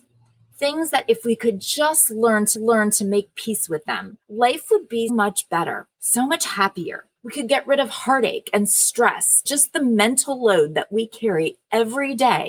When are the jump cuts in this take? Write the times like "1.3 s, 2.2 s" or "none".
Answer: 2.5 s, 4.2 s, 5.1 s, 5.9 s, 7.2 s, 9.5 s